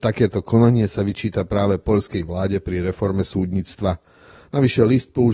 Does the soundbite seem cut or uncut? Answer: uncut